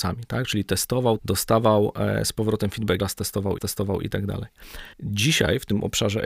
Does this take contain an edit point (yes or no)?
yes